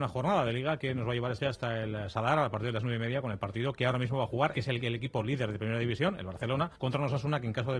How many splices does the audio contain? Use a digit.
3